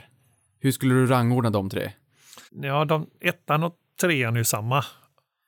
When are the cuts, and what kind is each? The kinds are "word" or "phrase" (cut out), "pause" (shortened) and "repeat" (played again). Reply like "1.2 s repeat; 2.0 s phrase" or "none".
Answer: 2.5 s pause